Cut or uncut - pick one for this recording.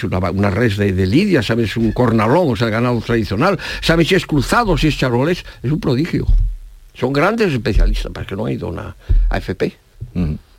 uncut